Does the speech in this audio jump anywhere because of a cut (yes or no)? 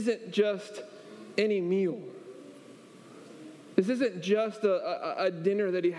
no